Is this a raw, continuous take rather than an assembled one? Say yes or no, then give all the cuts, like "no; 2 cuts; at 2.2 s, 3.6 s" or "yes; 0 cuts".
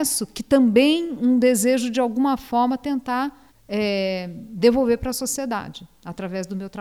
no; 1 cut; at 3.5 s